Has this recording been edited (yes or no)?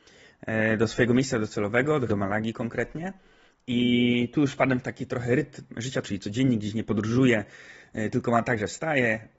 yes